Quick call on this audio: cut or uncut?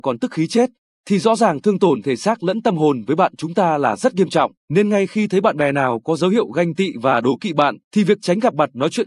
cut